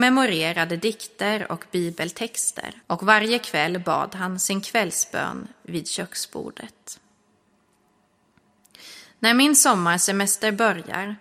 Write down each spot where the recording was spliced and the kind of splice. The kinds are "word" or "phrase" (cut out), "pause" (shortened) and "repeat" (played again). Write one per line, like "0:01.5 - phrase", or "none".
0:02.8 - pause